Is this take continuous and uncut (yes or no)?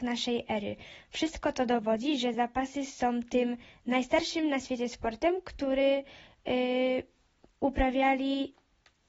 yes